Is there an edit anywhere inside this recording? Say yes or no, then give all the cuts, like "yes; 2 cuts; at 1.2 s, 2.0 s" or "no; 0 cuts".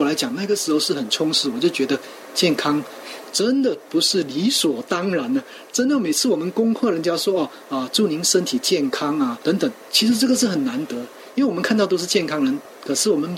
yes; 1 cut; at 2.3 s